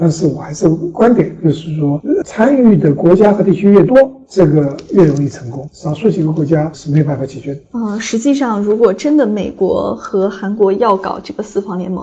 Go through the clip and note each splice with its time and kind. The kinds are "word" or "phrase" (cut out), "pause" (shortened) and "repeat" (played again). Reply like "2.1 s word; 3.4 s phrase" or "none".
2.2 s word